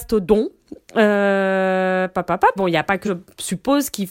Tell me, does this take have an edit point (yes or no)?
yes